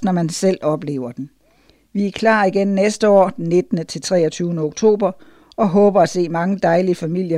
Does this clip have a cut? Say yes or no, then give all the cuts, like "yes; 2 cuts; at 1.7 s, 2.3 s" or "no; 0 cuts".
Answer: no; 0 cuts